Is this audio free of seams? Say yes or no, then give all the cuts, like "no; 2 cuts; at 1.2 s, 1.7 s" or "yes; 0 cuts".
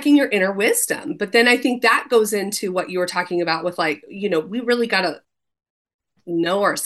yes; 0 cuts